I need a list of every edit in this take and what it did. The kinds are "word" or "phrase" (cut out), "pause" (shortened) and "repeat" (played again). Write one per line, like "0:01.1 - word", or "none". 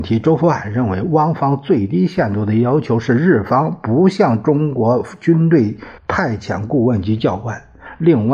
0:06.0 - pause